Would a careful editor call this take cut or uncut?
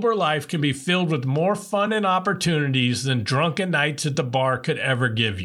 uncut